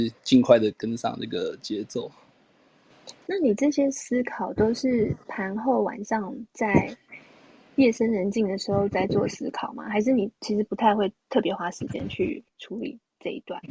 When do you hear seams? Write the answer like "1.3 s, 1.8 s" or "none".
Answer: 10.4 s, 12.5 s